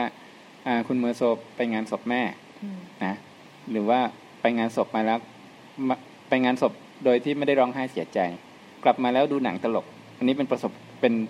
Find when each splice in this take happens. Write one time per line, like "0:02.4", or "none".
0:08.7